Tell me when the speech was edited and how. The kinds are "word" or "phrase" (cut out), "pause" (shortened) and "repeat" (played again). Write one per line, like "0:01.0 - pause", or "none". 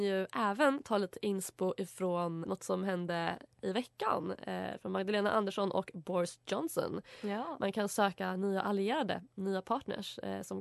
0:02.4 - word